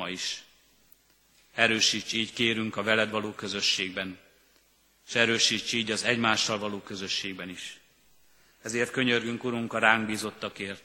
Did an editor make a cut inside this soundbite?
no; 0 cuts

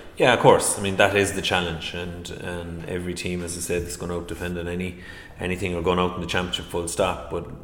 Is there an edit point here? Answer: no; 0 cuts

